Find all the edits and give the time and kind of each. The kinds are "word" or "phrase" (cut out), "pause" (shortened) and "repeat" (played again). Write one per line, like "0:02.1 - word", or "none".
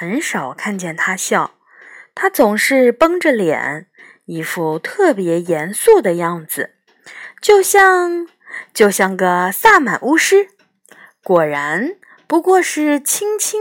none